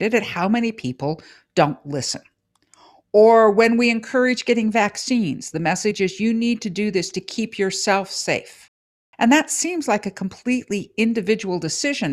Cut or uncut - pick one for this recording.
uncut